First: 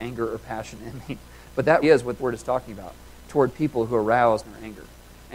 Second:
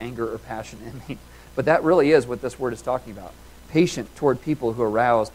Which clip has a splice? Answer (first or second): first